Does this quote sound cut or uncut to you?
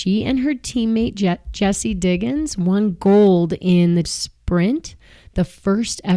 cut